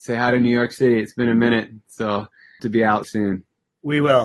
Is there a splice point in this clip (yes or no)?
yes